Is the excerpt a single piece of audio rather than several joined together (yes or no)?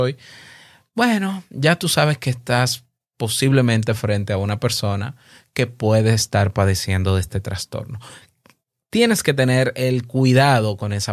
yes